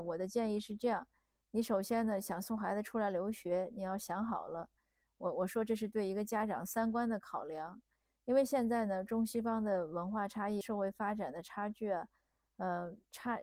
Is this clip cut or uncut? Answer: cut